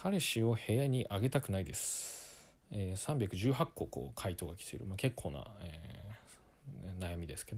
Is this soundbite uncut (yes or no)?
no